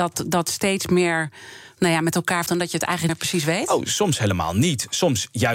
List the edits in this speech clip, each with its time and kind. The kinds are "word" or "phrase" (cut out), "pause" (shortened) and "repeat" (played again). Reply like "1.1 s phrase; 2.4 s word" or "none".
2.5 s word; 3.1 s word